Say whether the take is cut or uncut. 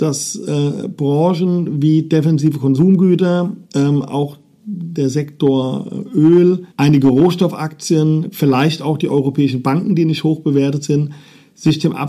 cut